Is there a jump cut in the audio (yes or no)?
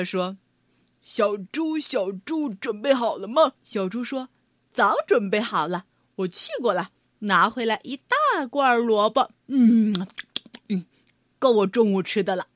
yes